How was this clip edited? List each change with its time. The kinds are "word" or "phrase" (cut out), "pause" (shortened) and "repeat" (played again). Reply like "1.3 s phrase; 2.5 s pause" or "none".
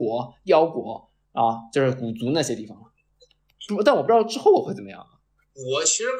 none